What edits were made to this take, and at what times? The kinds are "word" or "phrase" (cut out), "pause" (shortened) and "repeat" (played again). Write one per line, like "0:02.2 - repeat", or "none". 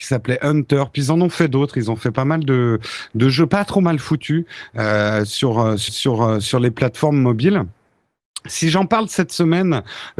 0:05.9 - repeat